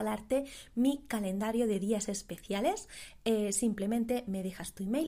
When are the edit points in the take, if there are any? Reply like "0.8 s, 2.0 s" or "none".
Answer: none